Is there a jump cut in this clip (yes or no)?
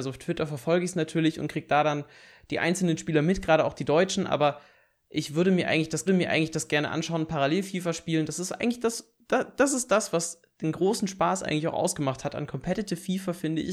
yes